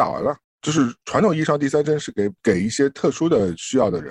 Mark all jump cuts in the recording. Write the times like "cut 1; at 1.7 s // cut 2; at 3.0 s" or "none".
cut 1; at 2.4 s